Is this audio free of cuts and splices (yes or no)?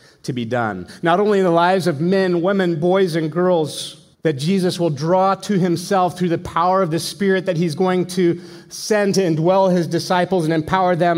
no